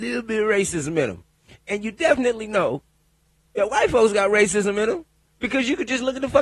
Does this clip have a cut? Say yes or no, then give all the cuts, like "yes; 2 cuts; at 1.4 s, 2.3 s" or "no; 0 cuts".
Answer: no; 0 cuts